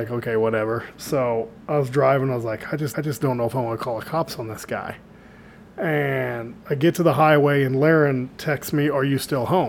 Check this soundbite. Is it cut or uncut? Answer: cut